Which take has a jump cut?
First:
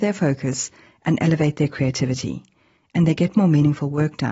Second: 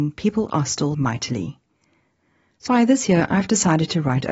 second; 2 cuts; at 0.9 s, 2.7 s

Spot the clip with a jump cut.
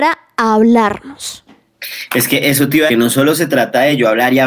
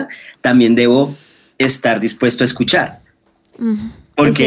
first; 1 cut; at 2.9 s

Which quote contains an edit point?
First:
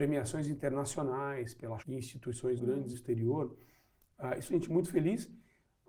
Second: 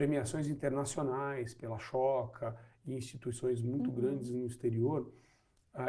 first; 4 cuts; at 1.8 s, 2.6 s, 2.9 s, 4.5 s

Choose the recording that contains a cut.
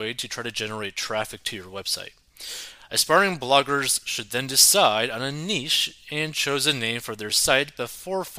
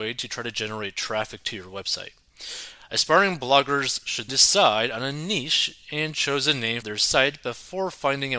second; 2 cuts; at 4.3 s, 6.8 s

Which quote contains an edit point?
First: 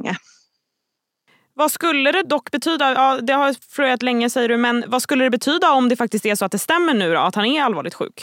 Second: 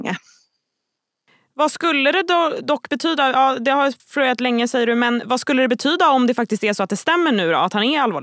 first; 1 cut; at 2.2 s

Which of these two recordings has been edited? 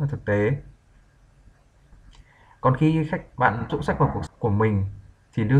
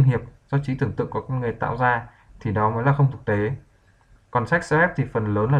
first; 2 cuts; at 3.7 s, 4.3 s

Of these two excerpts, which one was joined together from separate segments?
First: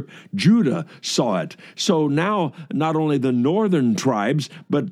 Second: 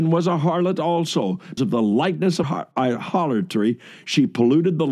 second; 2 cuts; at 1.6 s, 2.4 s

